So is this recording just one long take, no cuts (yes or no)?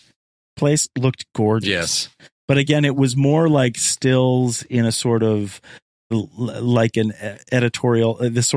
yes